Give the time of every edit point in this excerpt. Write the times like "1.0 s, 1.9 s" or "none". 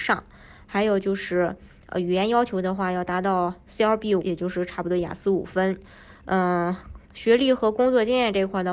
4.2 s, 7.0 s